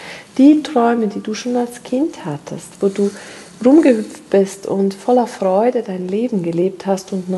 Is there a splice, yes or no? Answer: no